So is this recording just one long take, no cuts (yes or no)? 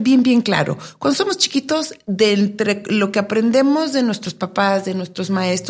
yes